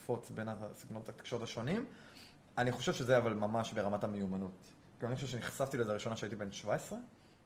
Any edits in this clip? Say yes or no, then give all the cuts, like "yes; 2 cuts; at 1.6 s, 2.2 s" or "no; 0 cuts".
no; 0 cuts